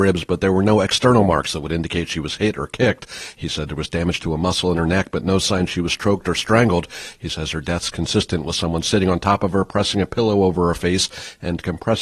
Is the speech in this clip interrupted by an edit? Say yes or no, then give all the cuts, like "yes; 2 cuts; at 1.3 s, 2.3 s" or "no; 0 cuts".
no; 0 cuts